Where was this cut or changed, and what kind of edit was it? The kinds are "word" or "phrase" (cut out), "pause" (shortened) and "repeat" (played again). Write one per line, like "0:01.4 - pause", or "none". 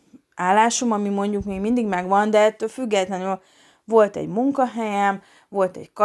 none